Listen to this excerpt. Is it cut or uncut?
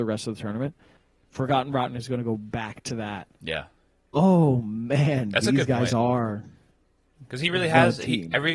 uncut